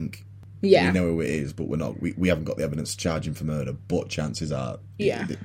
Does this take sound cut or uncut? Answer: uncut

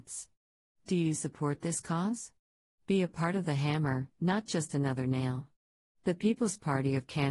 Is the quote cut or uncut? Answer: uncut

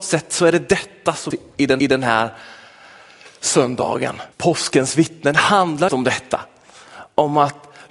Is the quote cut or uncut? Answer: cut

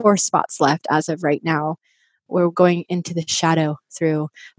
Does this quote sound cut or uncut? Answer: uncut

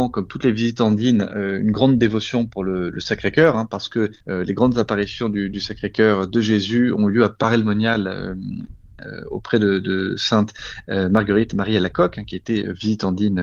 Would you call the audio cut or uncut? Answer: cut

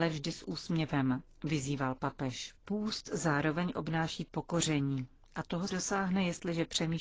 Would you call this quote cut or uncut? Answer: cut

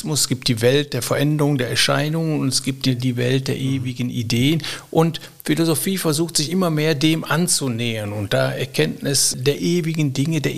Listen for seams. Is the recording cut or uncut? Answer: uncut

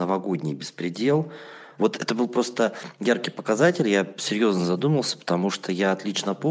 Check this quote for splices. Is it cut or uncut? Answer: uncut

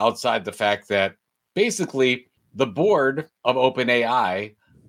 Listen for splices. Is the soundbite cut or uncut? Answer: cut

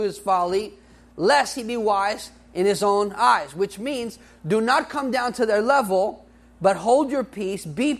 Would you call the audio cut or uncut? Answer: uncut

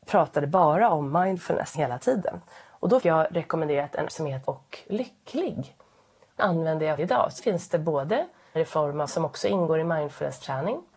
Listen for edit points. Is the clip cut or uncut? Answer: cut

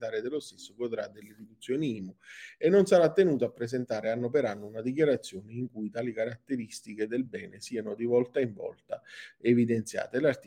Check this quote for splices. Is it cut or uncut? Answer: uncut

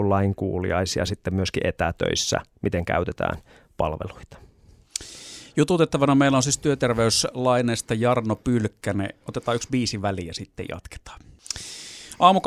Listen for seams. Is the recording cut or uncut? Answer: uncut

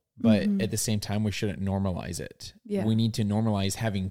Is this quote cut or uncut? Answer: uncut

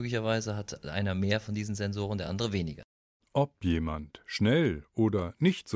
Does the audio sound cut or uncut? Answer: uncut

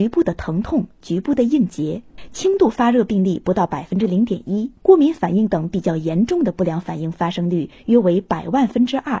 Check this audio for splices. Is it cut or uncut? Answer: cut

